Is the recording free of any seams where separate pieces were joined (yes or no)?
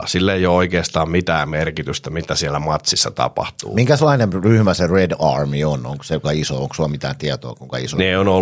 no